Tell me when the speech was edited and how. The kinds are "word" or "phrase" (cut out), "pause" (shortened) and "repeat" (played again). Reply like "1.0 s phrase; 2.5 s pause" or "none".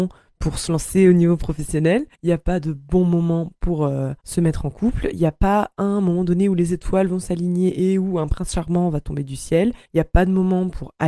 2.1 s pause; 4.2 s pause; 9.8 s pause